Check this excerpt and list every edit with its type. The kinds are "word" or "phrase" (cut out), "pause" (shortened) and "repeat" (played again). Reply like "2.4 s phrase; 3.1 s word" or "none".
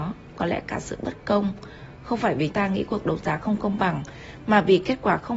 2.5 s word